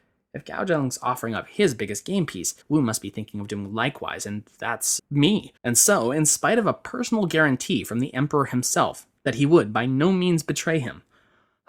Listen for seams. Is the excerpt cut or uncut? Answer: cut